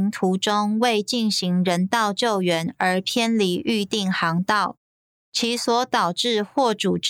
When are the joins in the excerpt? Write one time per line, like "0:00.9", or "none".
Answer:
none